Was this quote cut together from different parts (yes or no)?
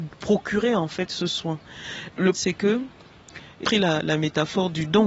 yes